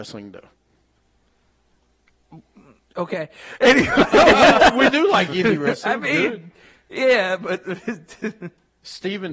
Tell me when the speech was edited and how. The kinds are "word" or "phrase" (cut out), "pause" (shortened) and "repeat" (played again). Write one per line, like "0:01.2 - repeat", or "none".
none

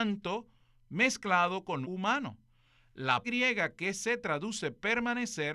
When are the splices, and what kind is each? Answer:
0:01.8 - phrase
0:03.2 - word

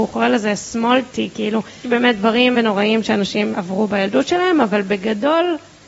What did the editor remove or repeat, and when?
0:01.1 - word
0:01.8 - word
0:02.5 - word
0:03.5 - word

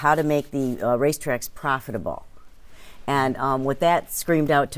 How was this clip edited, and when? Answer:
none

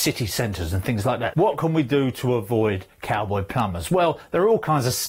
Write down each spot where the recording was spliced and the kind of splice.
none

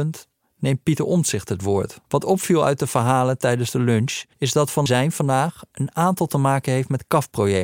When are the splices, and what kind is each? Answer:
0:02.0 - pause
0:04.3 - pause
0:04.9 - phrase

